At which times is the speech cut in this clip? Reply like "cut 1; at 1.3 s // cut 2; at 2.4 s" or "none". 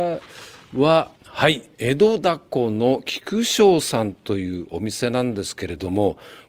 cut 1; at 1.2 s // cut 2; at 1.7 s

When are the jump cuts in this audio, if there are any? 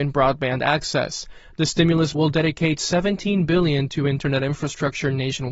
cut 1; at 2.2 s

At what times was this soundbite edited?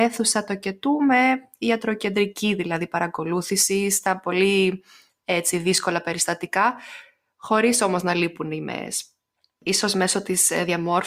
none

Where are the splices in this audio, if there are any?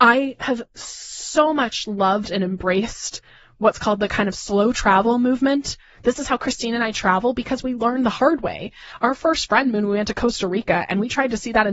none

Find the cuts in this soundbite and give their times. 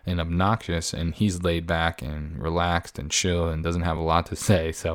none

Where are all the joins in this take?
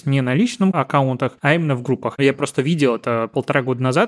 none

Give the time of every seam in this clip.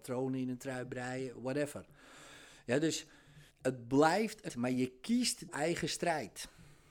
cut 1; at 3.5 s // cut 2; at 4.5 s // cut 3; at 5.5 s

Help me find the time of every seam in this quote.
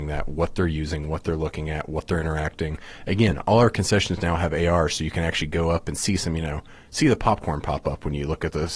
none

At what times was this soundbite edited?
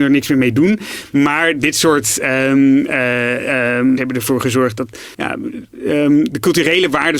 cut 1; at 4.0 s // cut 2; at 5.1 s

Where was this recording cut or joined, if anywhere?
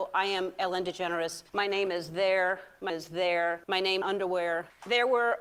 cut 1; at 1.5 s // cut 2; at 2.9 s // cut 3; at 3.6 s // cut 4; at 4.0 s

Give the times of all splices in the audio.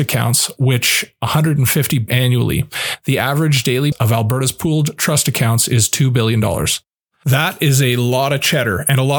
cut 1; at 2.1 s // cut 2; at 3.9 s

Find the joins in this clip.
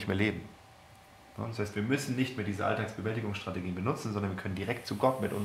none

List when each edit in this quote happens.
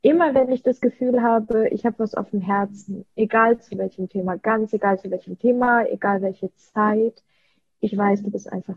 none

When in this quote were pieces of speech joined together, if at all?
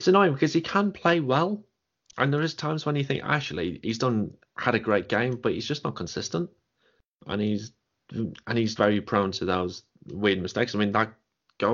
cut 1; at 8.8 s

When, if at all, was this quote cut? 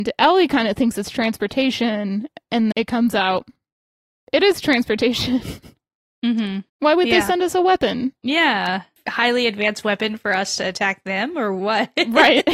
cut 1; at 2.7 s // cut 2; at 6.7 s

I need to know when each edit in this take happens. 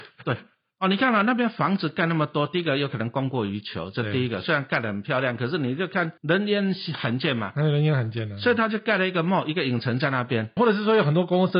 cut 1; at 6.2 s // cut 2; at 10.6 s

